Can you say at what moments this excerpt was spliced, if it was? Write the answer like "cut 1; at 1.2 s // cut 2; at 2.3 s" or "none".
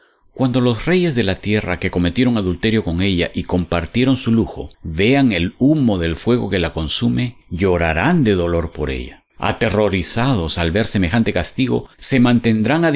cut 1; at 4.7 s // cut 2; at 7.4 s // cut 3; at 9.3 s // cut 4; at 11.9 s